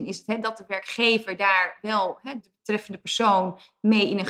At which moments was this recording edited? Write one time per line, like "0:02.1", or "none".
0:02.4